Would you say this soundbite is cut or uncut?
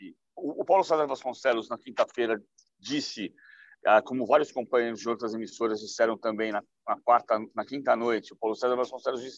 uncut